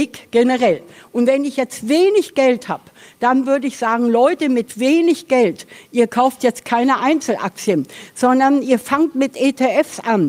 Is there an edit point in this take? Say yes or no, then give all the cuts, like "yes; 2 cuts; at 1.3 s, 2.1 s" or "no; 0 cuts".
no; 0 cuts